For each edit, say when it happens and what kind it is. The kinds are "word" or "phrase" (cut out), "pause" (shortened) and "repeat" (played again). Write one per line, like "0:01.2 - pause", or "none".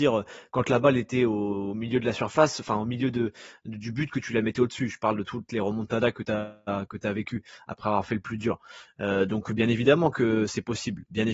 none

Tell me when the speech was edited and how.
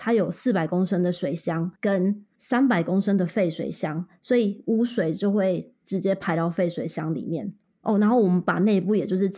0:01.8 - pause

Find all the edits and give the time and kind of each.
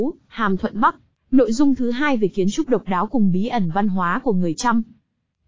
0:01.1 - pause

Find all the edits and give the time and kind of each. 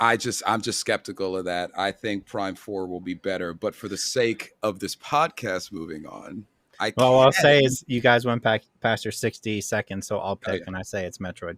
none

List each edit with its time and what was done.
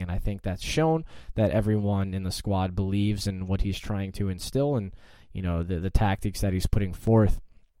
none

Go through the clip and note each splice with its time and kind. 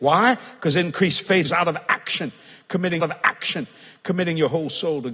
0:01.4 - word
0:03.0 - repeat

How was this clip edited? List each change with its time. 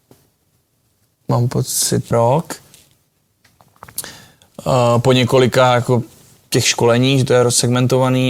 0:02.1 - word

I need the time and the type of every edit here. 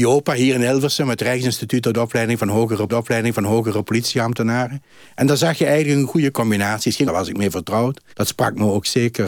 0:02.9 - repeat
0:07.0 - phrase
0:08.1 - pause

